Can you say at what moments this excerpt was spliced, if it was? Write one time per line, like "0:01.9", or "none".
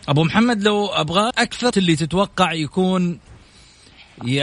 0:01.3
0:01.7